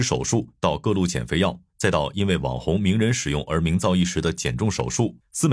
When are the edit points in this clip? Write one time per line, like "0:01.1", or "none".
none